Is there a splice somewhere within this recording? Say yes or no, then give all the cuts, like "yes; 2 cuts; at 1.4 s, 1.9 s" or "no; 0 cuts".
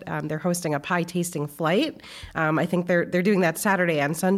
no; 0 cuts